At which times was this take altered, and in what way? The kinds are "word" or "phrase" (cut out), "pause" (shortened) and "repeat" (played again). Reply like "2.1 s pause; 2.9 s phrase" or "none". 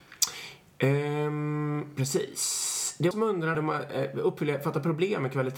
3.1 s phrase; 3.5 s word